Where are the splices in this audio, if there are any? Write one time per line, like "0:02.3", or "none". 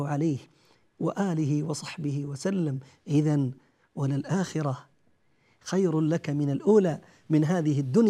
none